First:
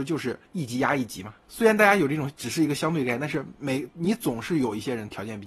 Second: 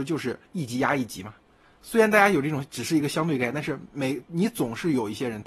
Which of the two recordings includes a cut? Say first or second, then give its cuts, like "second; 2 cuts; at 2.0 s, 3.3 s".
first; 1 cut; at 1.4 s